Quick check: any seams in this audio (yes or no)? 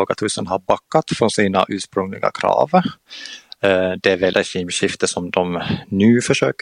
yes